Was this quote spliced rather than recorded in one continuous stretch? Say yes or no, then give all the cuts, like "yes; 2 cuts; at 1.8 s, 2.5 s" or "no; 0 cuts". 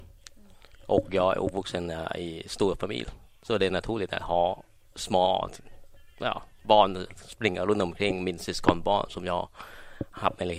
no; 0 cuts